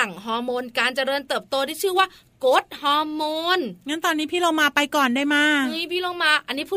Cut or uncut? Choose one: uncut